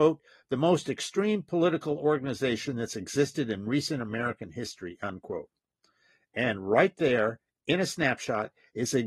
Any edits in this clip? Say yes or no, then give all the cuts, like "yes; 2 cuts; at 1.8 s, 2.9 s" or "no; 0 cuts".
no; 0 cuts